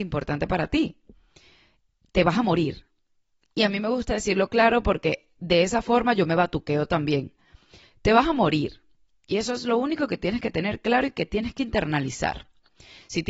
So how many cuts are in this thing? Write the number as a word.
zero